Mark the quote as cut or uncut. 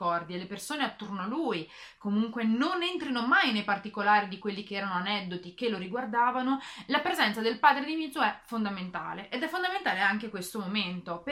uncut